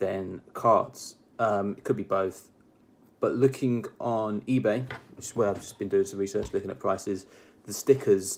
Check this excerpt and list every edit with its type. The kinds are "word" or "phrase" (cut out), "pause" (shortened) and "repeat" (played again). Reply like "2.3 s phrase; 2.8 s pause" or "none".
none